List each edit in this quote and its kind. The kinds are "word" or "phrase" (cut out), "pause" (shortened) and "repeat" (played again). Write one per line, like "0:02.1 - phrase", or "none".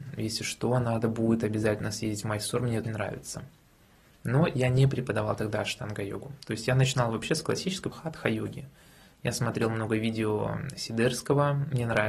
0:02.8 - word
0:07.9 - word